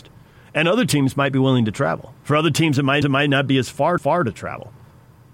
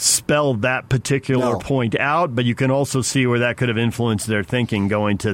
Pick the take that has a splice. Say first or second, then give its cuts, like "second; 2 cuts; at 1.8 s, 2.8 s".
first; 2 cuts; at 3.0 s, 4.0 s